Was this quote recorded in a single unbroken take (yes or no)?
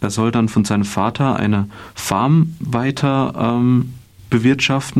yes